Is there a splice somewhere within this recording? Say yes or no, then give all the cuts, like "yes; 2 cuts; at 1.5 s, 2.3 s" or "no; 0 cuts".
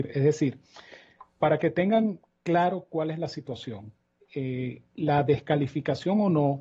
no; 0 cuts